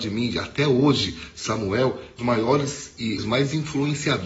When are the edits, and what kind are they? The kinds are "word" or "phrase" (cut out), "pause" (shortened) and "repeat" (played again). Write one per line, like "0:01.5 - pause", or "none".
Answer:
0:02.2 - phrase
0:03.2 - phrase